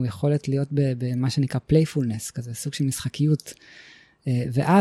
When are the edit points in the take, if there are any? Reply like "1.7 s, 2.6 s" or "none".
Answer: none

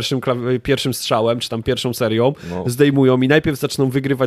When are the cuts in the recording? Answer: none

